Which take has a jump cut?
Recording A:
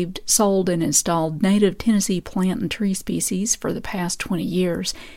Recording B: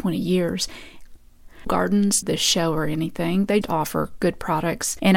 B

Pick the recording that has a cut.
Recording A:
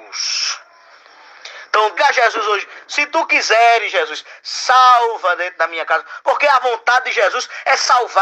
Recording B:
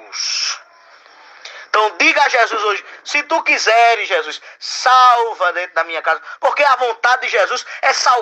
A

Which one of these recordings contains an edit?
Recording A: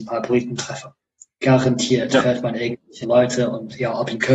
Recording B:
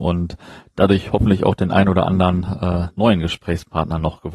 A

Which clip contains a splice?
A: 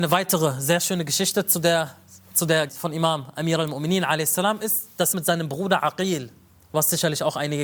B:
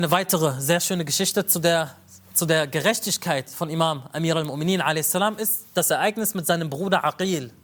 A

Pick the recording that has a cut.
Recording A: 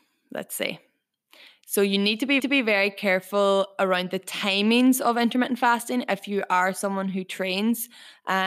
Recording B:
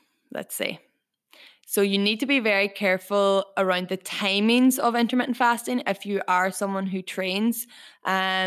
A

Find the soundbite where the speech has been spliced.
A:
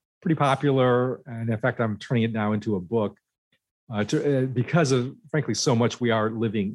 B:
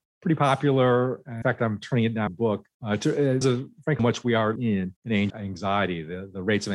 B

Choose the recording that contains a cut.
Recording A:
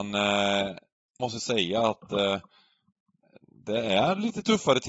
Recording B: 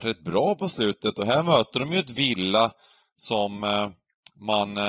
A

